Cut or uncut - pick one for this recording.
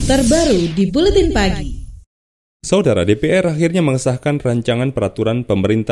uncut